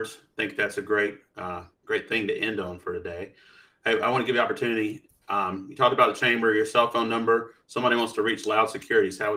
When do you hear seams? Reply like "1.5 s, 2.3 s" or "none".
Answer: 1.7 s